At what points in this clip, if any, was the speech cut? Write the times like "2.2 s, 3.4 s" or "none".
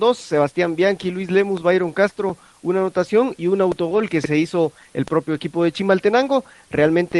none